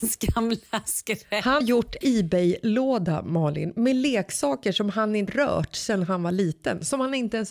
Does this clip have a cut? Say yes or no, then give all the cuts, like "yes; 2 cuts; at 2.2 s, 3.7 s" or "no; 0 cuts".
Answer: yes; 3 cuts; at 1.6 s, 2.0 s, 5.3 s